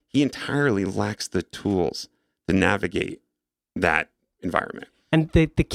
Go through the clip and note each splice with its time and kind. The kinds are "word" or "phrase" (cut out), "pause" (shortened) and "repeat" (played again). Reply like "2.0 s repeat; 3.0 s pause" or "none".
none